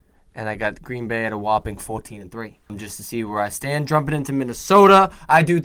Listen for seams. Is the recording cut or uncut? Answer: cut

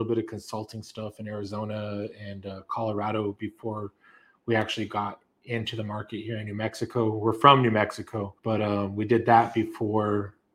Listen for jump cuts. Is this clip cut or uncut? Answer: cut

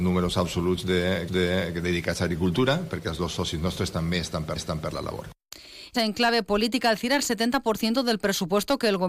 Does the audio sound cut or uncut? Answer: cut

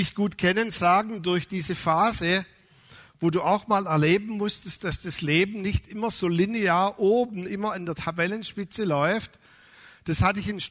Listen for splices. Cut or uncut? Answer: uncut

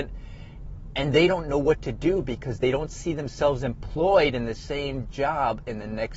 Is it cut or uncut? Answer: uncut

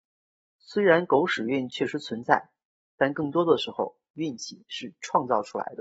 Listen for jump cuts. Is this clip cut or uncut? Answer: uncut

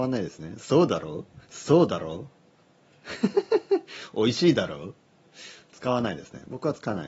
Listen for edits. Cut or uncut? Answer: cut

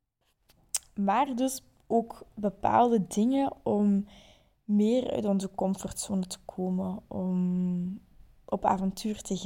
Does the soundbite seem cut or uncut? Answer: uncut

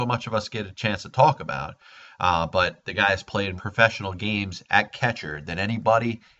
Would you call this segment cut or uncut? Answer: cut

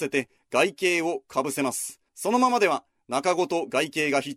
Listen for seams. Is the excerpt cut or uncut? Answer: cut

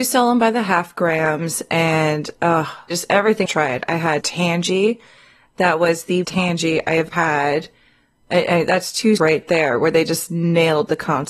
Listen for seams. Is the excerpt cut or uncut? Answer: cut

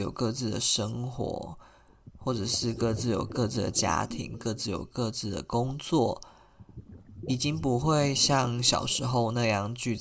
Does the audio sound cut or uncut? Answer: uncut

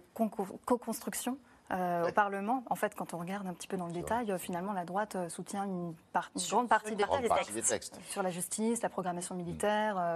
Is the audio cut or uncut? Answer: uncut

